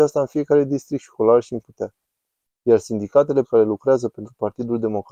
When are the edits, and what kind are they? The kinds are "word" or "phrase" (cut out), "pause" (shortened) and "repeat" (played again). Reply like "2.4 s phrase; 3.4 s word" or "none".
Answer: 1.6 s phrase; 3.4 s word